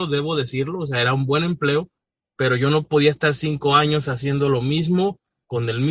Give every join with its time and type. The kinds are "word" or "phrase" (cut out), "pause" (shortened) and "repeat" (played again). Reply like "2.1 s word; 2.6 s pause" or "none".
none